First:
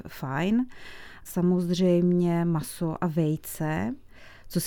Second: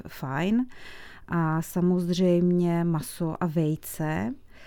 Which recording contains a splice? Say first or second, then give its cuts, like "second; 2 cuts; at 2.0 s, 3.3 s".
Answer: first; 1 cut; at 1.3 s